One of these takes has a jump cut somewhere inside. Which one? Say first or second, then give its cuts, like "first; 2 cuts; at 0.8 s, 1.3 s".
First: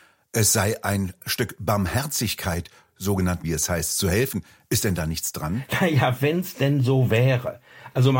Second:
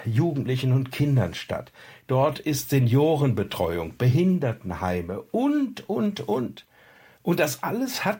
first; 1 cut; at 3.4 s